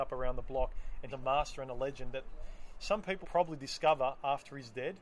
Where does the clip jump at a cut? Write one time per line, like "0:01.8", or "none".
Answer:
0:01.1
0:03.2